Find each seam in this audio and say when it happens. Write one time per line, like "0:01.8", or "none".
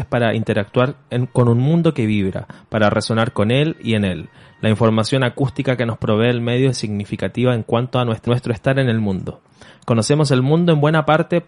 0:08.3